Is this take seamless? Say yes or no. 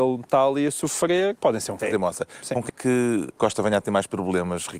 no